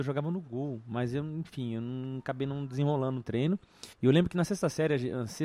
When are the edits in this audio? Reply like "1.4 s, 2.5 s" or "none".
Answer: 3.2 s, 3.9 s